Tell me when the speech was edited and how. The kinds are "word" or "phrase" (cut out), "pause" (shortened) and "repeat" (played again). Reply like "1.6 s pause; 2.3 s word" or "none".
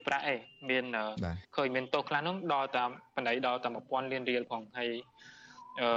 1.4 s pause